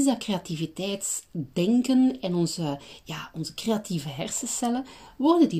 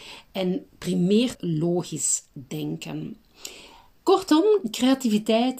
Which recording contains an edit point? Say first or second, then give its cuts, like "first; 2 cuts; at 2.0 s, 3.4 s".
second; 1 cut; at 1.3 s